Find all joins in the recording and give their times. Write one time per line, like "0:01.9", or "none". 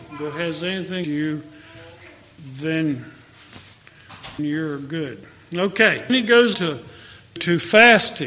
0:01.0
0:04.4
0:06.1
0:06.5
0:07.4